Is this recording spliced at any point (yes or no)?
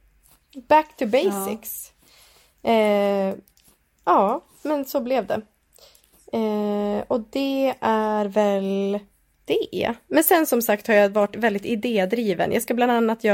no